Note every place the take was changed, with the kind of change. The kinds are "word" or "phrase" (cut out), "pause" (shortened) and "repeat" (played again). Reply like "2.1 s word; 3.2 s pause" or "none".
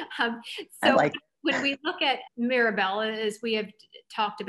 2.3 s word